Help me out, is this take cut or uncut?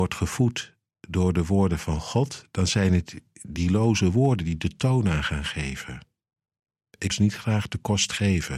cut